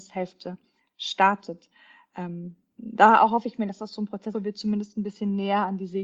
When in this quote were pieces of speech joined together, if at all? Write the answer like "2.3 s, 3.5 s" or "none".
2.8 s, 4.3 s